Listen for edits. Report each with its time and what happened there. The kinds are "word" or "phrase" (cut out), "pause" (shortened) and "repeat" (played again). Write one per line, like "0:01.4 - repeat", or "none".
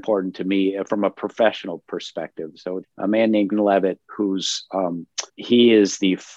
0:02.8 - word
0:03.5 - word
0:05.3 - pause